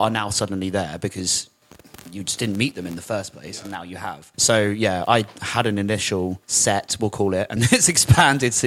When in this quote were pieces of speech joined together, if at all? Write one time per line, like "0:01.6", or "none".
0:04.3
0:06.4
0:07.6